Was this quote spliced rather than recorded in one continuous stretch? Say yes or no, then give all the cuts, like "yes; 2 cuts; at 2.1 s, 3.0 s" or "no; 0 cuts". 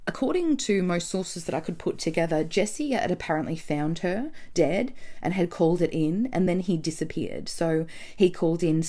no; 0 cuts